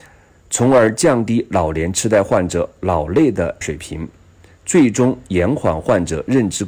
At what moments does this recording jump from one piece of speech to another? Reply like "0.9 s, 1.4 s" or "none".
3.6 s